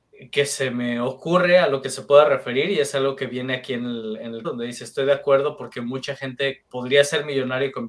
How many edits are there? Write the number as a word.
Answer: two